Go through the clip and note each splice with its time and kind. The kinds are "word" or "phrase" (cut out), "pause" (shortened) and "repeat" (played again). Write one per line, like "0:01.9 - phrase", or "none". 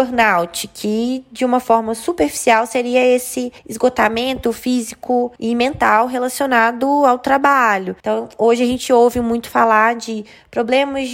0:03.6 - pause
0:05.4 - pause
0:08.0 - pause